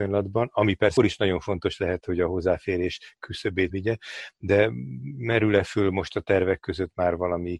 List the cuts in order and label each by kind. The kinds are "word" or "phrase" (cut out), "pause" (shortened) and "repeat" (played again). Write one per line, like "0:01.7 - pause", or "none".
0:01.0 - word
0:03.7 - word